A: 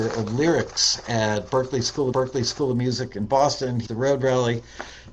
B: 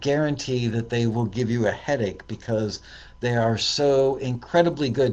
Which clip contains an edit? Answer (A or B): A